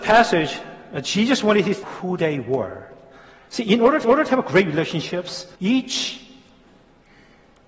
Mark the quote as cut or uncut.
cut